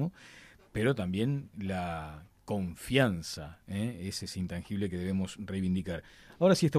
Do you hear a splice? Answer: no; 0 cuts

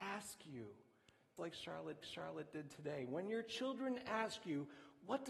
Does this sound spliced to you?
yes; 2 cuts; at 1.4 s, 2.0 s

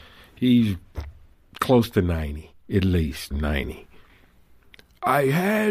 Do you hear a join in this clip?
yes; 1 cut; at 3.3 s

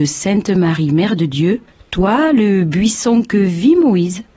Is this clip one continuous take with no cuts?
no; 1 cut; at 1.7 s

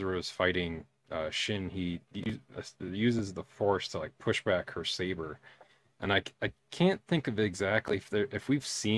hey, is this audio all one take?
yes; 0 cuts

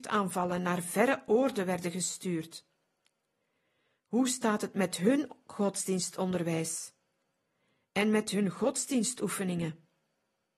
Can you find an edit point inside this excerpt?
no; 0 cuts

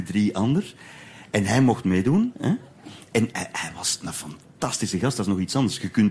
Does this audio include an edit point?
no; 0 cuts

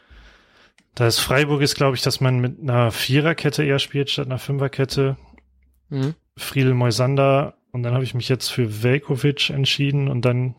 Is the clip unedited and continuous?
yes; 0 cuts

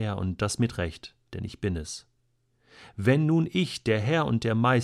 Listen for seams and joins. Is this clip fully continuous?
no; 1 cut; at 1.3 s

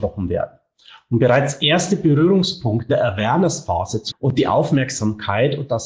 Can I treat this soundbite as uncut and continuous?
no; 2 cuts; at 2.9 s, 4.1 s

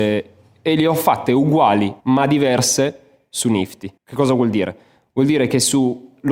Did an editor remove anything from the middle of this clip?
yes; 2 cuts; at 2.0 s, 4.0 s

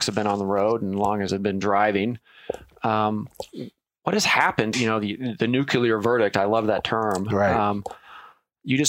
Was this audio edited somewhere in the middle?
yes; 2 cuts; at 1.3 s, 4.7 s

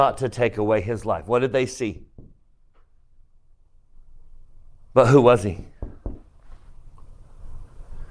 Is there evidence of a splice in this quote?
no; 0 cuts

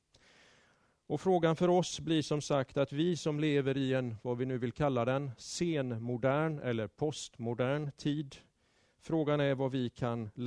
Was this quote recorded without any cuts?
yes; 0 cuts

